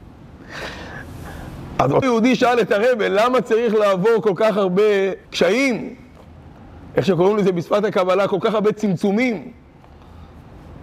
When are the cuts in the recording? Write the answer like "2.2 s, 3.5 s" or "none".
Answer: 2.0 s, 5.3 s